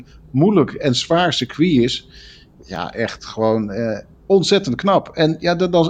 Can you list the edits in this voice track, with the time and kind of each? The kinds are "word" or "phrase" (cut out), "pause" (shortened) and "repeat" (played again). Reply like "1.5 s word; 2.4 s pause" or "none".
none